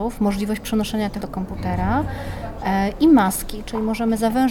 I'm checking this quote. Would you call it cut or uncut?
cut